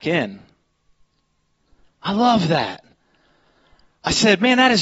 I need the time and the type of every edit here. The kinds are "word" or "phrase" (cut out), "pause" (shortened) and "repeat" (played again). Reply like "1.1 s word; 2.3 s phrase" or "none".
none